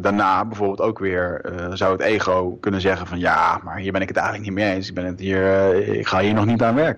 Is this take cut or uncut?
uncut